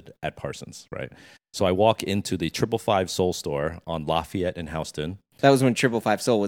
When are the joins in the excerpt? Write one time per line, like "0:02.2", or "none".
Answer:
none